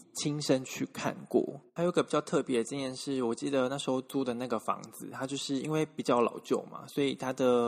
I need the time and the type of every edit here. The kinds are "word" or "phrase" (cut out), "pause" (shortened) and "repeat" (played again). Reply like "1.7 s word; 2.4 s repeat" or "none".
1.7 s pause